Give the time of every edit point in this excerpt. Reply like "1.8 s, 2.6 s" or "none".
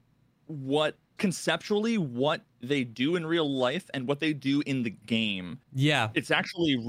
1.2 s, 5.6 s

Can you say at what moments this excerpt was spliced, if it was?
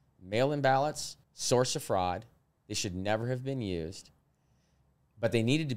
1.2 s

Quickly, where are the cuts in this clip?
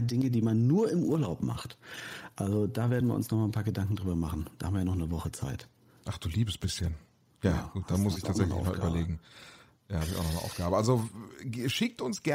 none

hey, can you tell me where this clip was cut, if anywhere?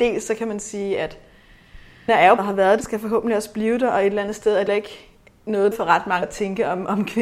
2.1 s, 2.4 s, 2.8 s, 4.7 s, 5.7 s, 6.2 s

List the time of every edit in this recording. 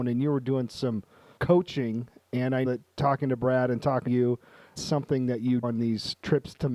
1.4 s, 2.7 s, 4.1 s, 4.8 s, 5.6 s

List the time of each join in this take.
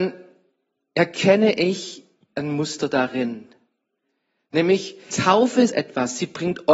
5.1 s, 5.7 s

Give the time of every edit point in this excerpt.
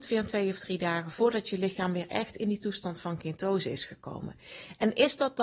none

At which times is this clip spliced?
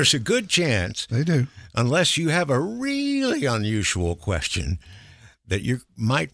none

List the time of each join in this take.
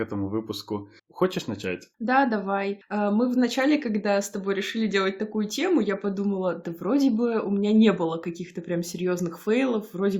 1.0 s, 1.9 s

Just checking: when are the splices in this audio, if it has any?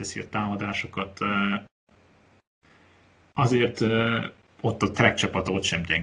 none

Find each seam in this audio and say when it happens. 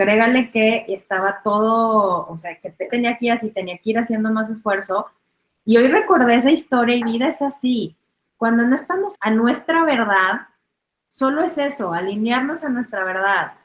2.9 s, 7.0 s, 9.1 s

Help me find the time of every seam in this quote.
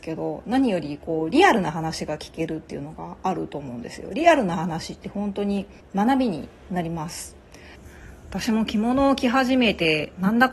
5.8 s

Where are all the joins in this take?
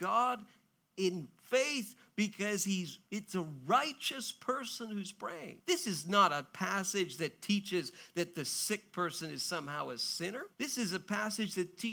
5.6 s, 10.5 s

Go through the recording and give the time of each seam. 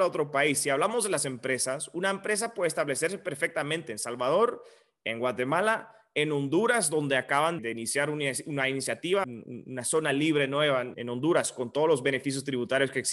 7.6 s, 9.2 s, 10.9 s

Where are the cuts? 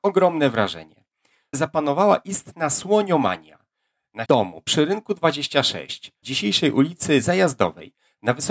1.5 s, 4.2 s, 6.2 s

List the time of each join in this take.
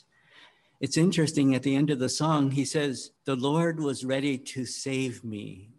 3.2 s

